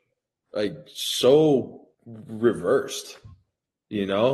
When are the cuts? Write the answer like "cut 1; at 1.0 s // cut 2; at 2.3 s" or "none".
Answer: cut 1; at 1.9 s